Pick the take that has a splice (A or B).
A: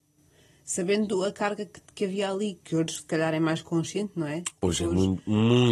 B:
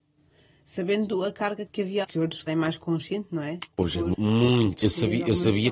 B